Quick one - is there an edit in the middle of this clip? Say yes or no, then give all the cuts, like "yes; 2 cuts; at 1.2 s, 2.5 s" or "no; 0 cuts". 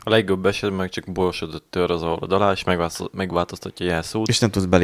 no; 0 cuts